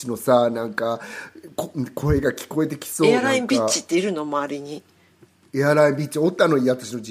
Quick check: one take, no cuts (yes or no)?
yes